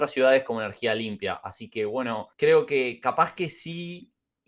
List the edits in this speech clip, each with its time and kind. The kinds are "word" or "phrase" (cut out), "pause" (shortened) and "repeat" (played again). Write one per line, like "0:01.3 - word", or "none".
0:02.3 - pause